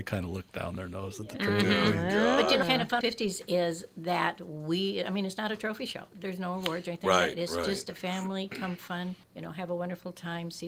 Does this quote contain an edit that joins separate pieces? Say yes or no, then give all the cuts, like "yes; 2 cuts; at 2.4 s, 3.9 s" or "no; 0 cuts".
yes; 4 cuts; at 2.6 s, 3.0 s, 6.1 s, 9.2 s